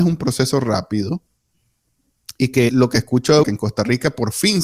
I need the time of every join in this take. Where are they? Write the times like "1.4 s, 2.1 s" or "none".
2.7 s, 3.4 s